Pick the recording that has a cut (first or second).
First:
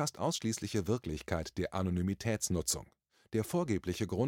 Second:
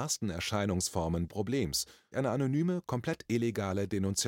second